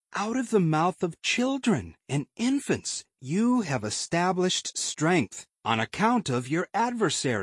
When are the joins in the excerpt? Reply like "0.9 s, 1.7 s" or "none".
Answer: 5.5 s